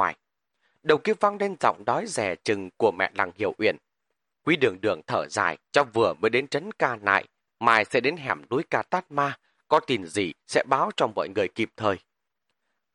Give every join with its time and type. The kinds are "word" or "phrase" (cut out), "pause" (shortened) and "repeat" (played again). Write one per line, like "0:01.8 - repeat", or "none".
0:05.6 - pause